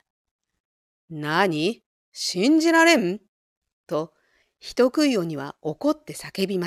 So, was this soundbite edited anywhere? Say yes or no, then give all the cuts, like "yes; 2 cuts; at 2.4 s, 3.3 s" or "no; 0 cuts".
no; 0 cuts